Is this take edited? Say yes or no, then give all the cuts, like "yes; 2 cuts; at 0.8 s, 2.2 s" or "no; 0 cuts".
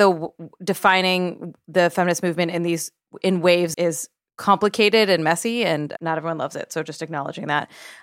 yes; 3 cuts; at 3.7 s, 4.3 s, 6.0 s